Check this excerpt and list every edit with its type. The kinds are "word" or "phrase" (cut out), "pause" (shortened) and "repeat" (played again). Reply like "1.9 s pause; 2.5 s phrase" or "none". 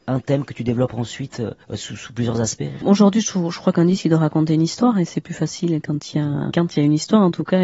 1.6 s pause; 2.8 s phrase; 6.5 s word